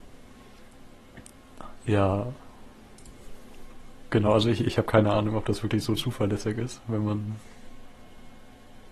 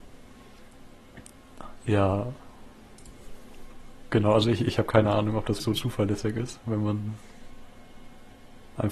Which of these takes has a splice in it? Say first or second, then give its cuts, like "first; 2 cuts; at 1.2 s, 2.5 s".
second; 1 cut; at 5.6 s